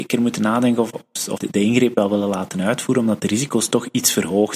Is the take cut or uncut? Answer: cut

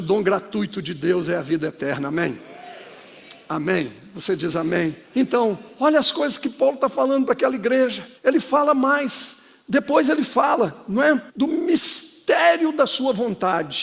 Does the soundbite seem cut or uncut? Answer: cut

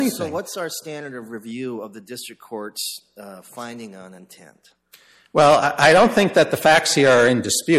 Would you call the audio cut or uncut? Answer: uncut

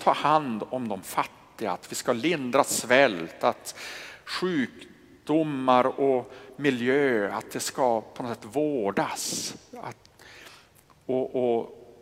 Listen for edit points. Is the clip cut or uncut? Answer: uncut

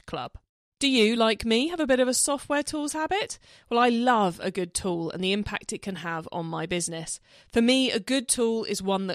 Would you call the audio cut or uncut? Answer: uncut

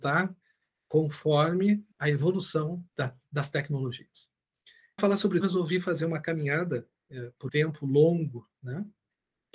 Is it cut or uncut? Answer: cut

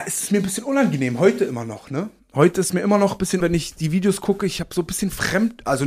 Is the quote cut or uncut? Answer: cut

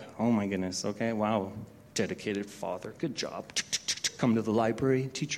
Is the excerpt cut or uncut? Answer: cut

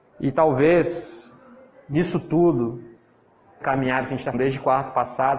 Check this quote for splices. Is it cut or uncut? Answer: cut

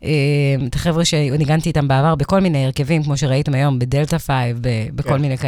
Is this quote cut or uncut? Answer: uncut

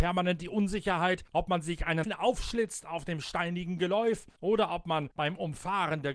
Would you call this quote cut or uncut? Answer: cut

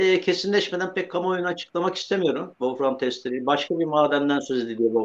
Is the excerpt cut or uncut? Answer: uncut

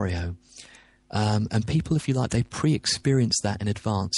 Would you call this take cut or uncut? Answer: uncut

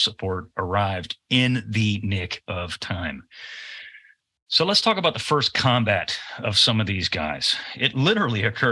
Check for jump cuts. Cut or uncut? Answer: uncut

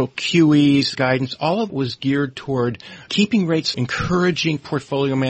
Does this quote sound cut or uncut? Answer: cut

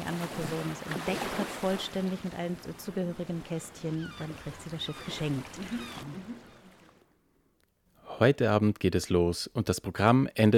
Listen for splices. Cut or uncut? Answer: uncut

